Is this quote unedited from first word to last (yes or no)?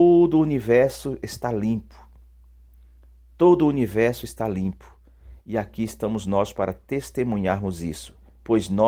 yes